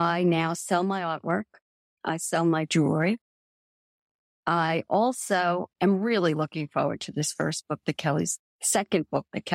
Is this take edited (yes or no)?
no